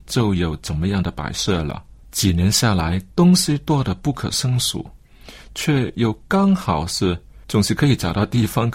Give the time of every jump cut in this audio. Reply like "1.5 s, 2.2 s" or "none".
2.0 s, 7.4 s